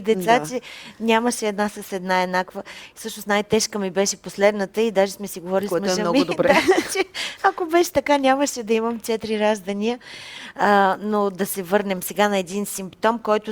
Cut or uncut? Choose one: uncut